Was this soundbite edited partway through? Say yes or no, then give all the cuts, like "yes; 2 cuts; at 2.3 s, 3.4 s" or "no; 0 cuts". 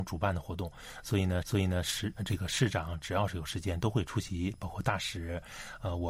yes; 1 cut; at 1.4 s